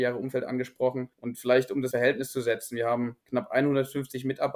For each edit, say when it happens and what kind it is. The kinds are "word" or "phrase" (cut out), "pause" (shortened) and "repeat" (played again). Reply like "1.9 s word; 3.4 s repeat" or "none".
1.1 s pause; 1.9 s word; 3.2 s pause